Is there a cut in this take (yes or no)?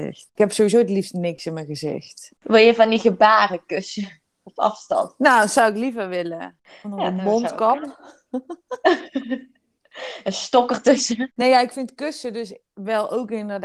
no